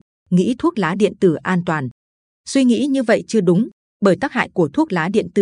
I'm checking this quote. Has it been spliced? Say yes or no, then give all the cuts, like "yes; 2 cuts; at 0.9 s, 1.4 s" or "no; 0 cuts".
no; 0 cuts